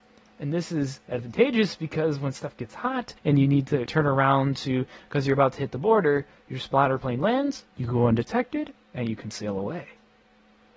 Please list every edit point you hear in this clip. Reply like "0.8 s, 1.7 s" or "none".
3.2 s, 3.9 s, 7.7 s, 8.7 s